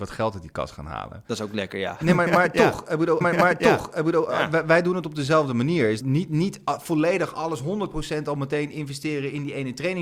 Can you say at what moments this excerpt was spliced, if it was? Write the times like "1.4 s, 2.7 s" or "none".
3.2 s, 6.0 s